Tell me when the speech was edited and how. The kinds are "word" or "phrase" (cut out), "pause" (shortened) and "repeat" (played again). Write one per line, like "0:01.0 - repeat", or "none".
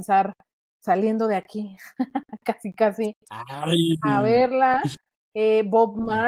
none